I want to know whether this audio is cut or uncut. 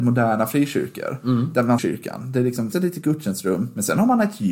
cut